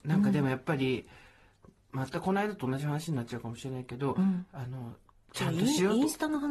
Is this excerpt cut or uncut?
uncut